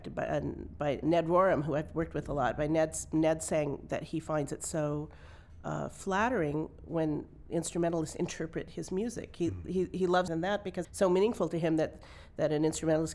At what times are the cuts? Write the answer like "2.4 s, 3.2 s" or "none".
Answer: 1.0 s, 10.3 s, 10.8 s